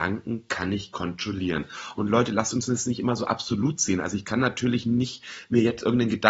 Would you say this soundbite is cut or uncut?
uncut